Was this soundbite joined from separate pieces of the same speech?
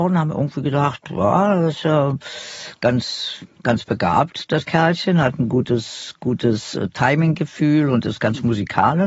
no; 0 cuts

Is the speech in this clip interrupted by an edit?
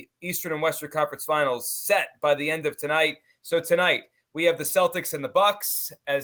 no; 0 cuts

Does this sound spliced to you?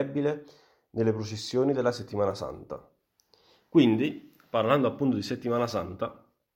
no; 0 cuts

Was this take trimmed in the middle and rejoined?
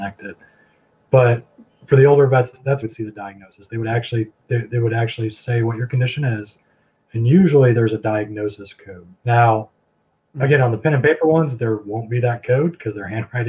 yes; 4 cuts; at 2.5 s, 2.8 s, 4.4 s, 9.2 s

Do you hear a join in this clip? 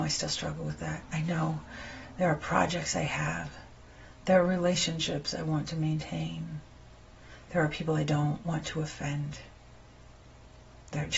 no; 0 cuts

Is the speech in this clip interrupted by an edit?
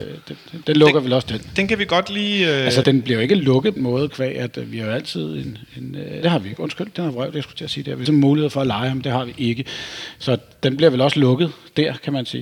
yes; 4 cuts; at 2.8 s, 3.8 s, 6.2 s, 8.0 s

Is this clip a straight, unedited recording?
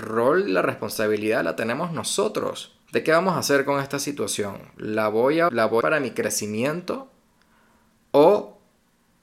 no; 3 cuts; at 2.8 s, 5.5 s, 5.8 s

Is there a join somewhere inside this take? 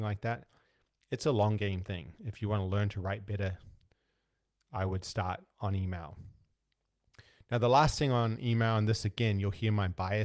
no; 0 cuts

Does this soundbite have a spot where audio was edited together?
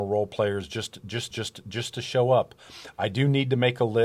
yes; 1 cut; at 1.3 s

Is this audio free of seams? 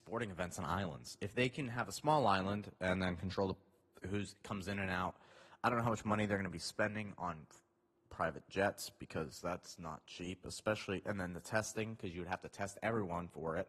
yes; 0 cuts

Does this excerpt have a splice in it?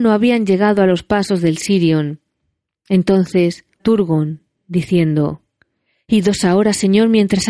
yes; 1 cut; at 3.8 s

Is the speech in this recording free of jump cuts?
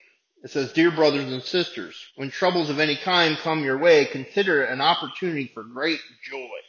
no; 1 cut; at 2.1 s

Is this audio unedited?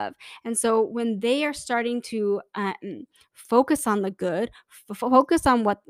yes; 0 cuts

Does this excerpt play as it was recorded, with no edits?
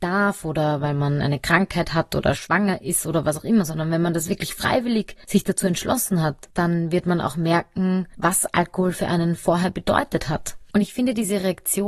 yes; 0 cuts

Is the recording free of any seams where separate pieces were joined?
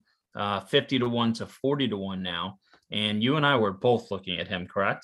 yes; 0 cuts

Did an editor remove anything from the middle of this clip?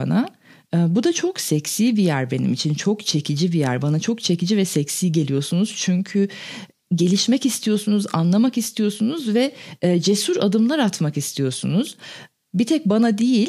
no; 0 cuts

